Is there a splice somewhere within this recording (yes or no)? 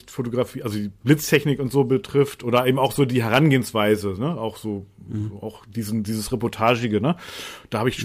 no